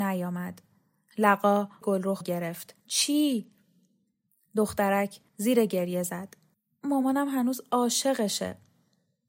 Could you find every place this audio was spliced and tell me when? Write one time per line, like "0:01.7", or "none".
0:01.8
0:02.2
0:02.8
0:05.3
0:06.5